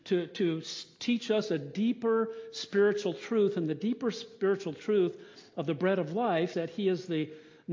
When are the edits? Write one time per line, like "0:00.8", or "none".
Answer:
0:06.5